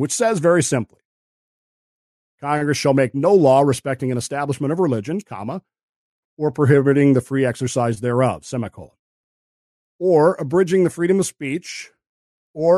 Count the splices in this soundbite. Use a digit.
0